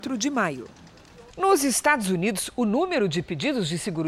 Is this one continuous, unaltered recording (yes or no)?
no